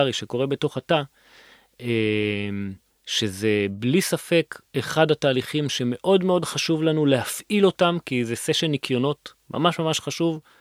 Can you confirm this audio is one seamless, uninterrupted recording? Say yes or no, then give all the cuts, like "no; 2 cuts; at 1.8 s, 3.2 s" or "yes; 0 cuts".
no; 3 cuts; at 2.9 s, 4.7 s, 9.4 s